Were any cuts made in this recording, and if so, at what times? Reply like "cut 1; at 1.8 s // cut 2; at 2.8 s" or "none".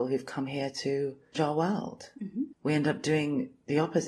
cut 1; at 1.3 s // cut 2; at 2.5 s